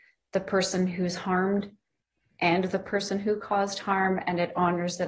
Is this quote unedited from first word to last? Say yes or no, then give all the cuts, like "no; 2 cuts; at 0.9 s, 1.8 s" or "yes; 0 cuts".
yes; 0 cuts